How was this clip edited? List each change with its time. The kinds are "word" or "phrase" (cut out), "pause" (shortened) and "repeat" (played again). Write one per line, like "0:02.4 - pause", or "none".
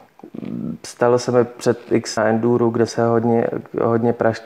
0:02.2 - phrase
0:02.9 - word